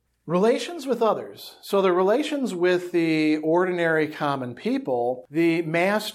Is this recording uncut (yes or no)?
yes